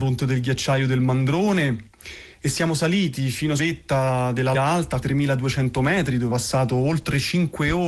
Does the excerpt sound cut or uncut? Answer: cut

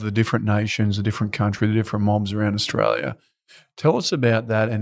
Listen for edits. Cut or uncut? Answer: uncut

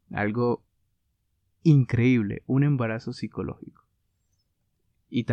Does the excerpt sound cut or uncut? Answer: uncut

